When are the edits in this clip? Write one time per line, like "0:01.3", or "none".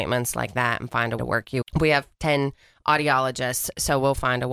0:01.2
0:01.6